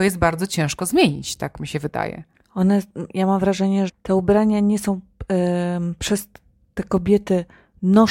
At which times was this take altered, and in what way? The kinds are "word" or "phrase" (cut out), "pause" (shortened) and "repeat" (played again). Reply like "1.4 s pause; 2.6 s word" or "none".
2.3 s pause; 3.9 s word